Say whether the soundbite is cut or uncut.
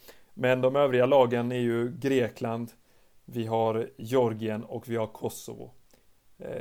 uncut